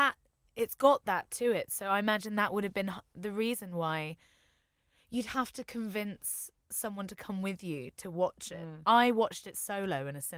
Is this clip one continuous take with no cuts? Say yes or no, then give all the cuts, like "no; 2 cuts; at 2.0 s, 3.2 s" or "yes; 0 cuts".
yes; 0 cuts